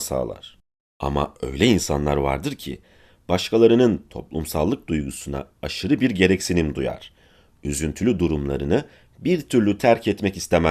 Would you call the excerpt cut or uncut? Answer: uncut